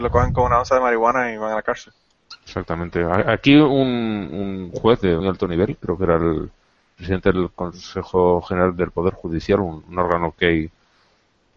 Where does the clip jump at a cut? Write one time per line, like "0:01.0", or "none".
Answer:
0:05.2